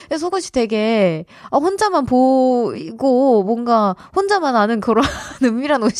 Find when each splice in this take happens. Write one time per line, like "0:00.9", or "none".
none

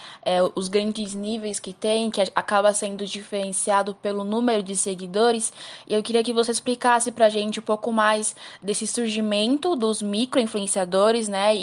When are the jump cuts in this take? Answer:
none

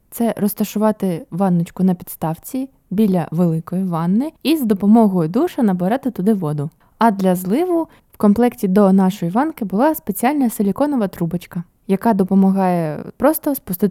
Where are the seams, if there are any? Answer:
0:04.4
0:06.8

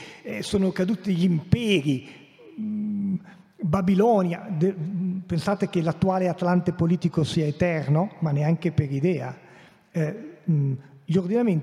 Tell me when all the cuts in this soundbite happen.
none

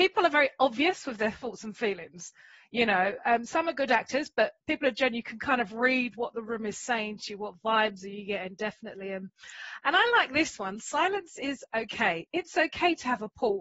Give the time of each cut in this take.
none

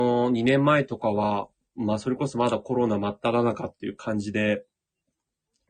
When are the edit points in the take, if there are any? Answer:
none

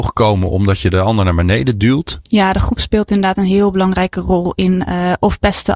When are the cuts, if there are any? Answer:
none

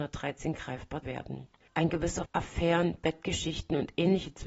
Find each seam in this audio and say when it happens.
0:01.0
0:02.2

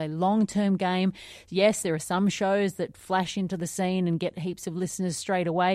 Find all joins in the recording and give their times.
none

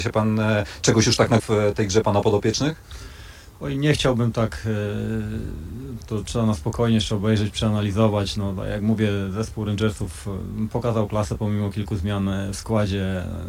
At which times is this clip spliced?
0:01.4
0:06.0

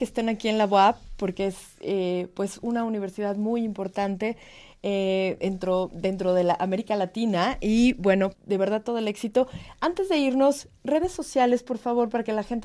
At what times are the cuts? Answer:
0:08.3

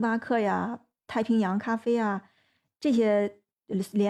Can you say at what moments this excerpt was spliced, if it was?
none

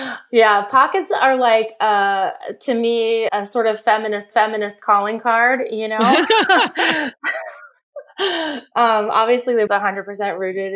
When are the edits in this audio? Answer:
0:03.3
0:04.3
0:09.7

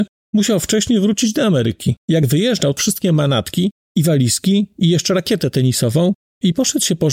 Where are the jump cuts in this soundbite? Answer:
0:02.0
0:02.8
0:03.8

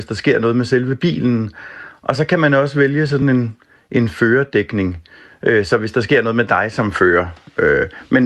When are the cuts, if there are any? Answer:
none

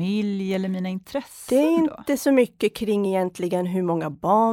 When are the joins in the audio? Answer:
none

